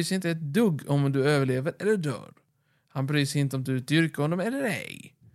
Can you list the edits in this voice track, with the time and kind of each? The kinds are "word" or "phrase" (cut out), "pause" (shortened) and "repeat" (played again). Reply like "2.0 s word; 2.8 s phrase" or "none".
none